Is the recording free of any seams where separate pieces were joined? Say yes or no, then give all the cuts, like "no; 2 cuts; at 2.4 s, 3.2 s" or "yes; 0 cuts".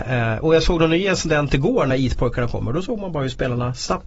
no; 1 cut; at 1.9 s